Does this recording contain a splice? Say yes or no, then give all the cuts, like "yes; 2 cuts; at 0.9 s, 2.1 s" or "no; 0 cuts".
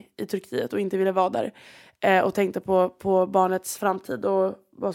no; 0 cuts